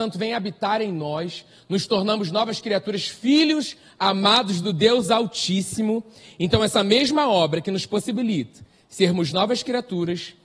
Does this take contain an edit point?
no; 0 cuts

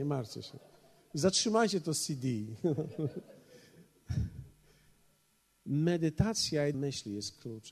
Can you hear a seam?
yes; 1 cut; at 6.7 s

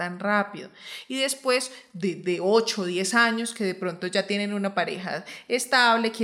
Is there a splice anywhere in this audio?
no; 0 cuts

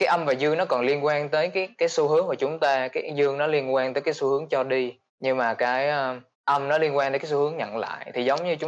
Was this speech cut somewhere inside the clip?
yes; 2 cuts; at 5.1 s, 6.3 s

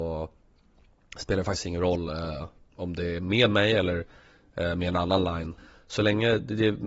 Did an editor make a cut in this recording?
no; 0 cuts

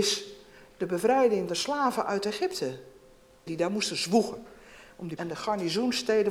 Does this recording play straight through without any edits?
no; 3 cuts; at 1.5 s, 3.5 s, 5.2 s

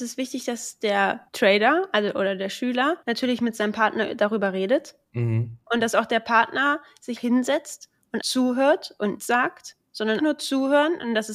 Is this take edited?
yes; 6 cuts; at 1.3 s, 3.0 s, 7.2 s, 8.2 s, 9.2 s, 10.2 s

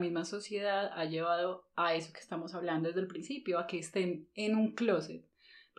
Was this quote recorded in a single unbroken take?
yes; 0 cuts

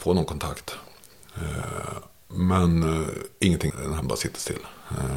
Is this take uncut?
no; 2 cuts; at 3.7 s, 4.0 s

